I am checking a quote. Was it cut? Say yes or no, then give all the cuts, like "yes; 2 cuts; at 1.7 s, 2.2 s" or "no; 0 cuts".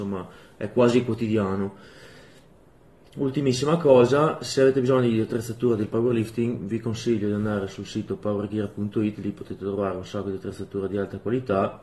no; 0 cuts